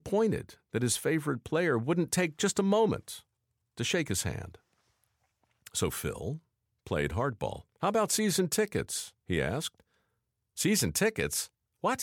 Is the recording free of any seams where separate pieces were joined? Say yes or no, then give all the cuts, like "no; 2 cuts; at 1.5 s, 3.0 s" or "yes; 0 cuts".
no; 2 cuts; at 7.7 s, 9.2 s